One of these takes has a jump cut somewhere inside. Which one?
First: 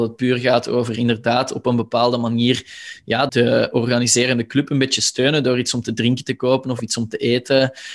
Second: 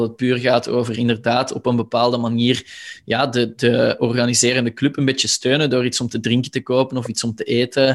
first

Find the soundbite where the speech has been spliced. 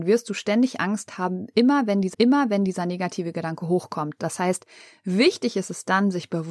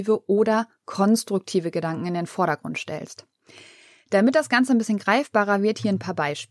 first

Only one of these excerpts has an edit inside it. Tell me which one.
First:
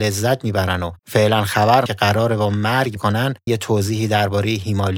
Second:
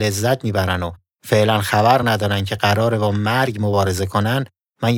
first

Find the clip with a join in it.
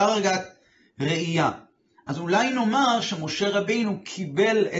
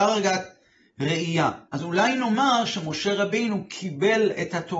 second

